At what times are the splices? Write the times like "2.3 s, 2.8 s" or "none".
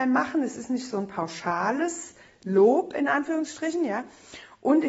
none